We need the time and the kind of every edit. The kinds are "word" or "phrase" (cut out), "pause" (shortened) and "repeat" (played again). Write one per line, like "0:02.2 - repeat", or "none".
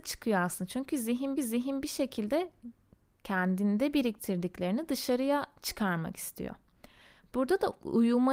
0:01.4 - repeat